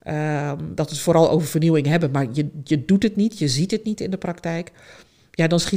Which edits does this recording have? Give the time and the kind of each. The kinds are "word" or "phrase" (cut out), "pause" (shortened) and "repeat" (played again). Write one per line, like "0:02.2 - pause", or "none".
none